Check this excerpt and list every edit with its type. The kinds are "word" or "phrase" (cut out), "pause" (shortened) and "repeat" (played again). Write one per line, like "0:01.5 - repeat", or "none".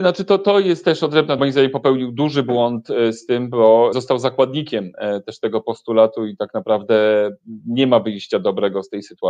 0:01.4 - word
0:03.9 - word